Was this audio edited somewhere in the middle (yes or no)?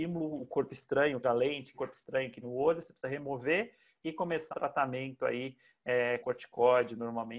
yes